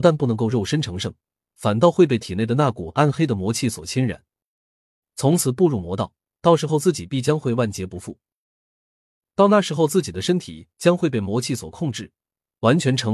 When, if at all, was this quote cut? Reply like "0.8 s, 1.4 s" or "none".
none